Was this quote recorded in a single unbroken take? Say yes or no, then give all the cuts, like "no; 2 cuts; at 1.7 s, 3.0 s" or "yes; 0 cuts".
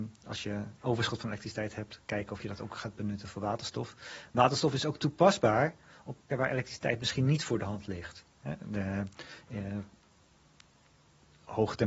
no; 1 cut; at 6.3 s